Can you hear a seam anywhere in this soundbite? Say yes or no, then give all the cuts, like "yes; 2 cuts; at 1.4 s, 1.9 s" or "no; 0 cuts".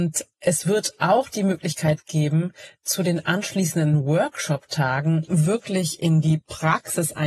no; 0 cuts